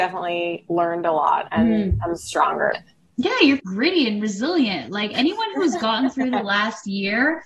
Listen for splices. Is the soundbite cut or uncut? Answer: cut